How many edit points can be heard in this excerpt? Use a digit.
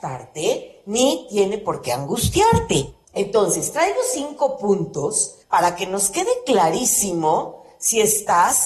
2